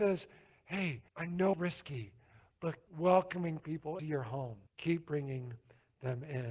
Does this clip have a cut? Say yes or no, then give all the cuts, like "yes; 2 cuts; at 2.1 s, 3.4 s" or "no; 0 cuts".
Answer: yes; 5 cuts; at 1.1 s, 1.5 s, 2.9 s, 4.0 s, 4.7 s